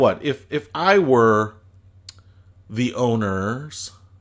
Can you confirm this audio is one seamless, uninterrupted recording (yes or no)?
yes